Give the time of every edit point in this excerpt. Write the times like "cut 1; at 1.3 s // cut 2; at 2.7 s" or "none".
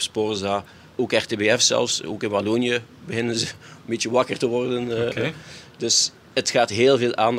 cut 1; at 0.9 s